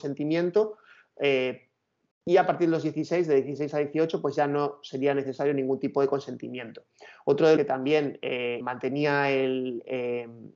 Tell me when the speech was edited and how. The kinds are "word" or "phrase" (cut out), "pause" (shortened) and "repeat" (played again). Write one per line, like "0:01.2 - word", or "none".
0:07.6 - phrase
0:08.6 - word